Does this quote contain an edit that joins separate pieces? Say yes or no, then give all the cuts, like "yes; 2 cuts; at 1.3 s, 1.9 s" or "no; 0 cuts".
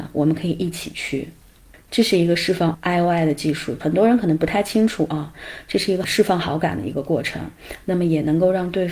no; 0 cuts